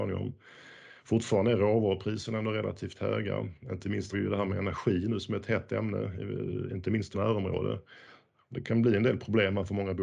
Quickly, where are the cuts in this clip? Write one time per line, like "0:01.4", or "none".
0:04.1
0:07.1